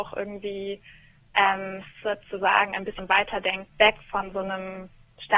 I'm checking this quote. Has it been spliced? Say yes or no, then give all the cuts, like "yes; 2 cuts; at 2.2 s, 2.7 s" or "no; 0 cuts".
yes; 2 cuts; at 3.0 s, 3.7 s